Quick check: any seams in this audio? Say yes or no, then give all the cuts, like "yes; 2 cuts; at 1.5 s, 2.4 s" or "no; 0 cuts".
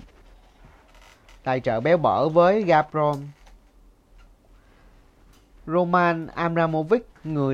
no; 0 cuts